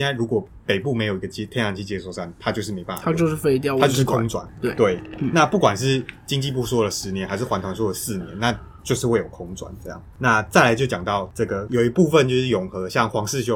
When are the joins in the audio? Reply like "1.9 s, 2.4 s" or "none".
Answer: none